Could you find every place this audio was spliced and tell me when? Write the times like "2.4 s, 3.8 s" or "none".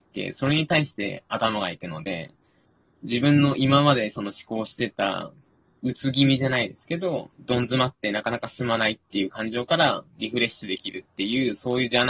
7.3 s

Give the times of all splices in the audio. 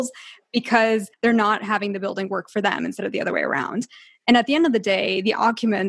1.1 s

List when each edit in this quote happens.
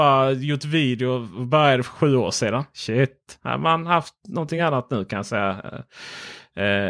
none

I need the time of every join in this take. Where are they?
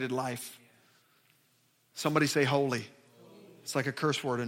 none

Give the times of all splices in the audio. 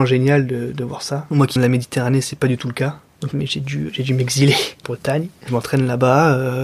1.6 s, 3.3 s, 3.9 s, 4.8 s

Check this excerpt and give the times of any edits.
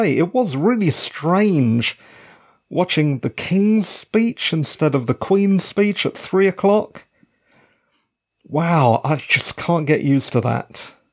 none

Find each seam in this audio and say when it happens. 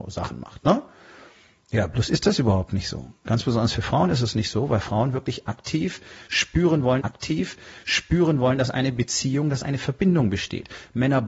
7.0 s

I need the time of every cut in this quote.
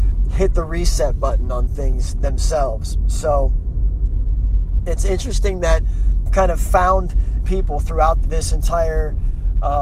6.3 s, 7.4 s, 8.2 s

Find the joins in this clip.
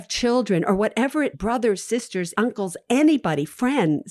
1.3 s, 2.3 s

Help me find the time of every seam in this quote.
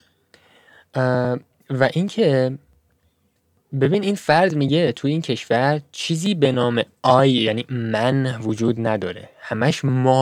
none

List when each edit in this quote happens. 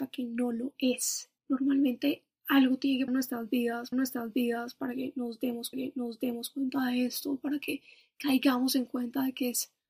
1.4 s, 3.1 s, 3.9 s, 5.7 s

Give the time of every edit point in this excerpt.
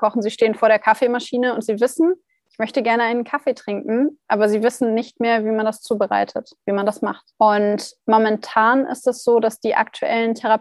7.3 s

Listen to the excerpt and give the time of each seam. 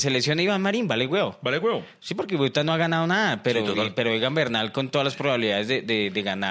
none

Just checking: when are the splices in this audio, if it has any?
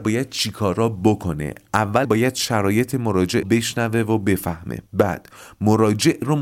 2.0 s, 3.4 s, 4.9 s

